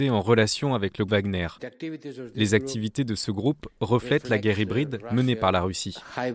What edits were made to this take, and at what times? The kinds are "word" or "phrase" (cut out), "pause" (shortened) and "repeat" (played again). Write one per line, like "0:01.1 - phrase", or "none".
0:01.1 - word

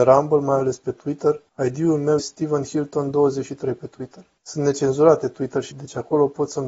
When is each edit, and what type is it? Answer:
0:01.5 - pause
0:02.2 - word
0:04.4 - pause
0:05.7 - word

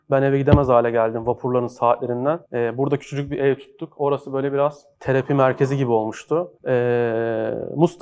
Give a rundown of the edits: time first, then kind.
0:02.4 - pause
0:04.9 - pause
0:06.6 - pause

